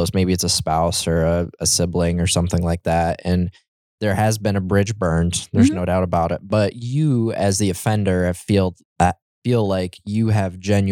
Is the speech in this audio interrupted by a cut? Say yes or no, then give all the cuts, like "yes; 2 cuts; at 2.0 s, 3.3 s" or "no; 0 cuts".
no; 0 cuts